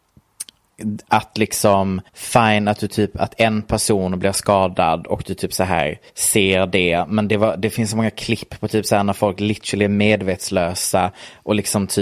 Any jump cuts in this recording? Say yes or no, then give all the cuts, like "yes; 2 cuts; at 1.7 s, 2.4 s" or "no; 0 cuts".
yes; 2 cuts; at 2.1 s, 6.1 s